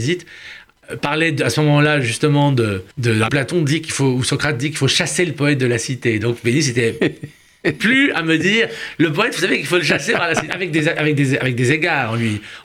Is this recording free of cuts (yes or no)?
no